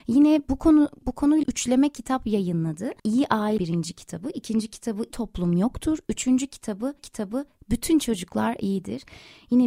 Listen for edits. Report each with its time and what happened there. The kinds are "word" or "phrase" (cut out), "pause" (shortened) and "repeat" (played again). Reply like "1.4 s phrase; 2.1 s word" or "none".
1.4 s phrase; 3.0 s pause; 3.6 s word; 5.1 s word; 7.0 s repeat